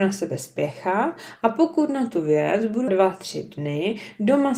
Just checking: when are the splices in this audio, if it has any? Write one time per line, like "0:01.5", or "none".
0:02.9